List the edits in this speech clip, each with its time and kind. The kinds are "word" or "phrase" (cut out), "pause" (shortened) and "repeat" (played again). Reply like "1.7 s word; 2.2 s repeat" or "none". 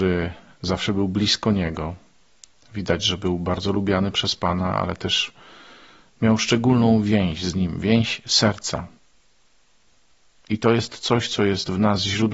none